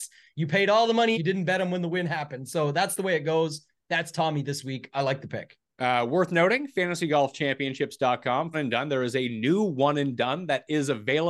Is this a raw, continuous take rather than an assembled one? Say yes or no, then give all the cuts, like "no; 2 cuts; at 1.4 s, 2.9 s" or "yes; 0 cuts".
no; 2 cuts; at 1.1 s, 8.5 s